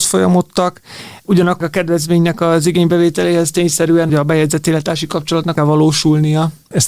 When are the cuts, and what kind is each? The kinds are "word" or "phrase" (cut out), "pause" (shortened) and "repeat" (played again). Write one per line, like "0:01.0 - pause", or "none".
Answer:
0:01.6 - word
0:04.1 - phrase
0:05.6 - phrase